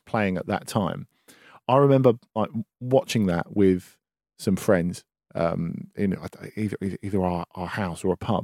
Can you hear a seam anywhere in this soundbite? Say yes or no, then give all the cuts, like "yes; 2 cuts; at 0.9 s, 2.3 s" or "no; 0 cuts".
no; 0 cuts